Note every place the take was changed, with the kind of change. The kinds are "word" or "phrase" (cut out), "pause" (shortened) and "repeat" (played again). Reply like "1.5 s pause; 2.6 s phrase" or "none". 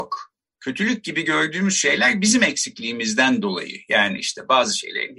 none